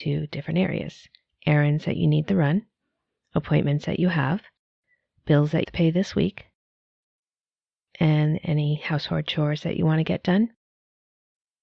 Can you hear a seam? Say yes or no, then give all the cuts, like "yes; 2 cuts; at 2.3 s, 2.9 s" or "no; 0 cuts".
yes; 1 cut; at 5.6 s